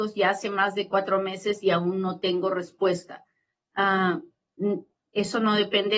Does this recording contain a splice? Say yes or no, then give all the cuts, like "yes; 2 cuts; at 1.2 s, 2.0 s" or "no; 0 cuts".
no; 0 cuts